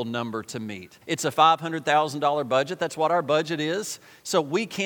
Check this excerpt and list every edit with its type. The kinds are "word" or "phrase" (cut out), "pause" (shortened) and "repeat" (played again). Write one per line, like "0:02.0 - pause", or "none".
0:01.0 - pause